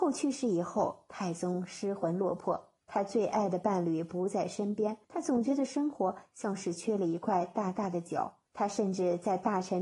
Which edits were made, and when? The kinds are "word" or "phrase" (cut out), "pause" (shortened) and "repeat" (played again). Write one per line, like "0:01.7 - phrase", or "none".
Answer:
0:02.8 - pause
0:05.0 - pause
0:08.5 - pause